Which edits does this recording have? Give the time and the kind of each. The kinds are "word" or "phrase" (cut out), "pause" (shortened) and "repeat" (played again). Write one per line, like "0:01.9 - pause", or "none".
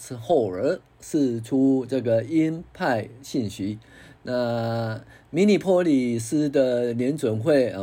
none